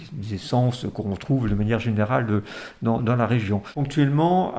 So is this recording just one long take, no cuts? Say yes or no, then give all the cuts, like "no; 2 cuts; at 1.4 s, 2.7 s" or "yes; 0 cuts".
no; 1 cut; at 3.0 s